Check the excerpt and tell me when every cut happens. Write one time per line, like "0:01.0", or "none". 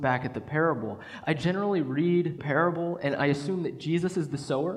0:02.4